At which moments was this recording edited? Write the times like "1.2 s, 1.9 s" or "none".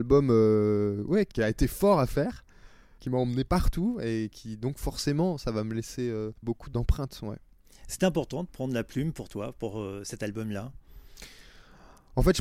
none